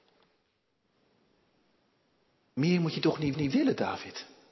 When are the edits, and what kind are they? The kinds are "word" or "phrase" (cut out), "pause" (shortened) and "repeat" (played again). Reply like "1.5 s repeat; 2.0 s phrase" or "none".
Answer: 3.3 s repeat